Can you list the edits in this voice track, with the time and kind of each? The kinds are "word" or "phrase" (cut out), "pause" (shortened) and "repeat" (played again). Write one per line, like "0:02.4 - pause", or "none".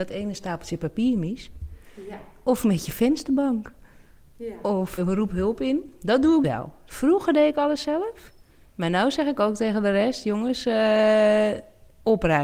0:05.0 - word
0:06.4 - word